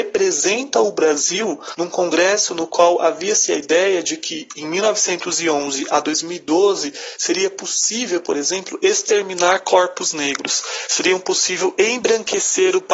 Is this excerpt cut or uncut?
uncut